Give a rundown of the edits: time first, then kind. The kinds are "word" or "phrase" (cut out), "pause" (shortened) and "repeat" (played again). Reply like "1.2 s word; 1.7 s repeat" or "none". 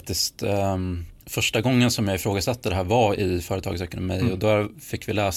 1.2 s pause